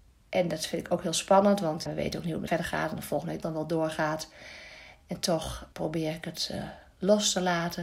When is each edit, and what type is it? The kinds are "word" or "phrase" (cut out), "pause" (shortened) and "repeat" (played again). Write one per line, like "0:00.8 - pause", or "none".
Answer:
0:01.9 - word
0:02.5 - phrase
0:03.4 - word
0:05.7 - pause